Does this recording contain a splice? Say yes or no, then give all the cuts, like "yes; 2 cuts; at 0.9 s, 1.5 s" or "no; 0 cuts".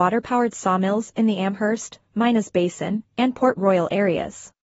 no; 0 cuts